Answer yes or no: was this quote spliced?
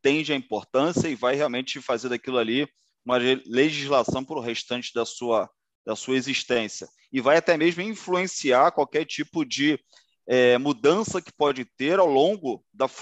no